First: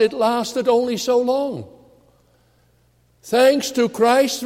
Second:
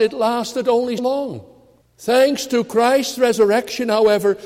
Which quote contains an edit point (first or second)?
second